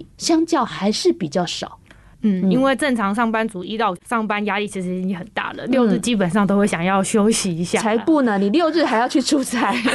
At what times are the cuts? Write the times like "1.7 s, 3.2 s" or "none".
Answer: 4.0 s